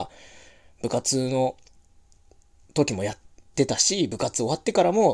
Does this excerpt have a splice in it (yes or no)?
no